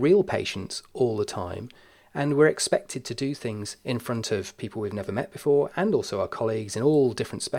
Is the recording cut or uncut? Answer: uncut